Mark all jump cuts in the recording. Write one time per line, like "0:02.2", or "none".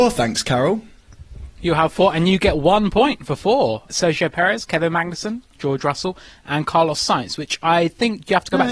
none